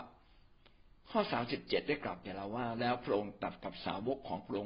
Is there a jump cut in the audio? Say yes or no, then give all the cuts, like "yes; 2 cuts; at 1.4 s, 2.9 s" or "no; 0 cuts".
yes; 1 cut; at 1.0 s